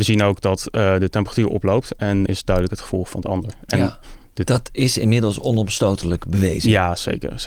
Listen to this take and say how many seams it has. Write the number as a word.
one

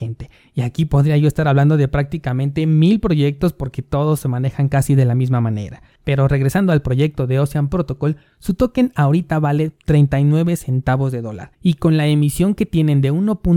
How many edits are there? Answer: one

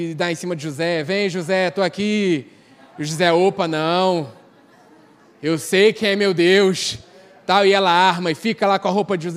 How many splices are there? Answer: zero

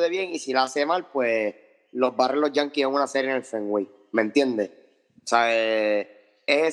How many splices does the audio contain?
zero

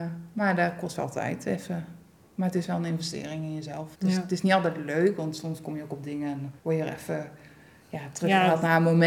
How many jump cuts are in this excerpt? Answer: two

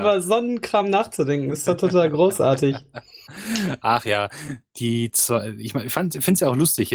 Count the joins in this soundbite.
zero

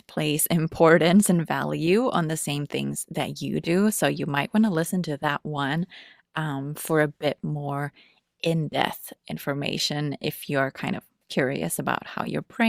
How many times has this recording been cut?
zero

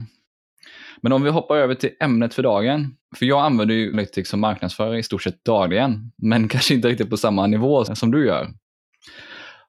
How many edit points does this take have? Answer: three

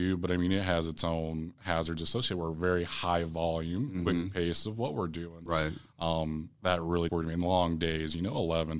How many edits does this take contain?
three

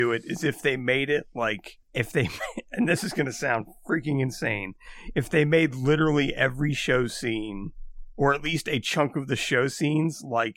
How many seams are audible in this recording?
one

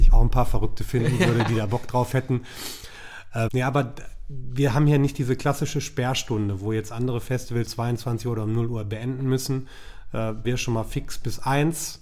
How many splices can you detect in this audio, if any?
three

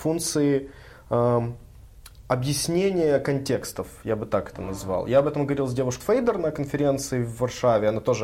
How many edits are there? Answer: one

